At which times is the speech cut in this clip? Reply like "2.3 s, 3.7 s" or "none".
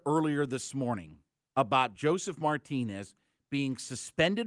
none